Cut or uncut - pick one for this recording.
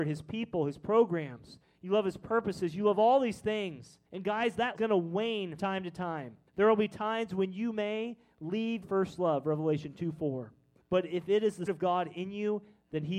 cut